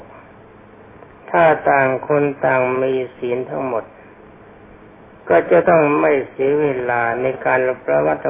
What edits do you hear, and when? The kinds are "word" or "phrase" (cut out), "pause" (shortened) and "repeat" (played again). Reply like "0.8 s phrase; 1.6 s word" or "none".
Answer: none